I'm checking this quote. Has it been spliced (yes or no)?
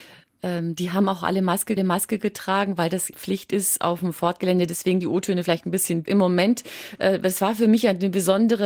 yes